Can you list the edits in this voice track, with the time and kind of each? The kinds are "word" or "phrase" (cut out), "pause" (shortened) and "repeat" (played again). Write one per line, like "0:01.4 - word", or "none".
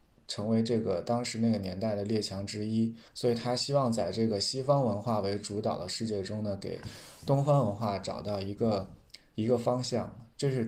0:03.1 - pause